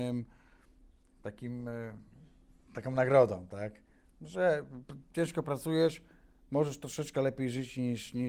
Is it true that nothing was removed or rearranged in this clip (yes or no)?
yes